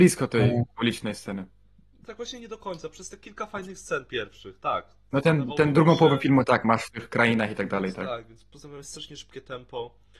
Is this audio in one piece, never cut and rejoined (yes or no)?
yes